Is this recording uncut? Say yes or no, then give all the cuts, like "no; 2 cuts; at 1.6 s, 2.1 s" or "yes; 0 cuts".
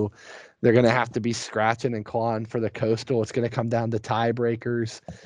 yes; 0 cuts